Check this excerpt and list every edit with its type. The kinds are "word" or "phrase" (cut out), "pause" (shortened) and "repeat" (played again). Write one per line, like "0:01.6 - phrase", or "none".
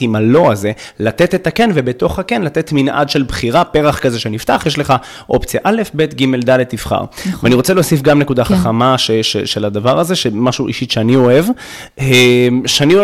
none